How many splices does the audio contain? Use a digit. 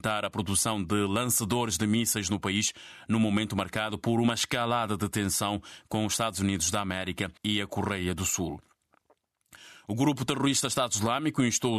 1